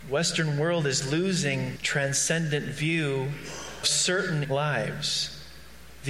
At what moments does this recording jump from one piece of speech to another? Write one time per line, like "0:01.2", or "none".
0:01.8
0:03.8
0:04.4